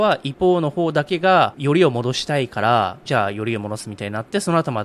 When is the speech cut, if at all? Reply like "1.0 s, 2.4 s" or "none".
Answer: 3.0 s